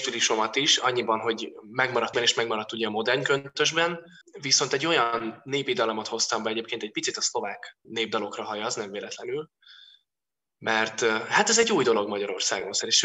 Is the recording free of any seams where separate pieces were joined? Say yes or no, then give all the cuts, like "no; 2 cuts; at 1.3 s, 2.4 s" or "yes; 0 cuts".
no; 3 cuts; at 2.1 s, 4.2 s, 7.8 s